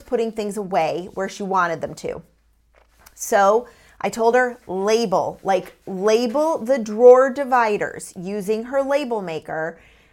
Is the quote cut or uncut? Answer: uncut